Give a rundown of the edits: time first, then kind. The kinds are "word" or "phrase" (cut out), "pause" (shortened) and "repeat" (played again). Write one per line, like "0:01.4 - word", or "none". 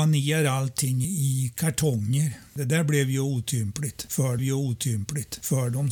0:01.0 - word
0:04.4 - repeat